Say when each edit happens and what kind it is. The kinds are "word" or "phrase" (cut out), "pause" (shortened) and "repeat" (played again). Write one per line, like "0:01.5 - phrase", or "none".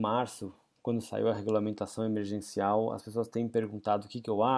none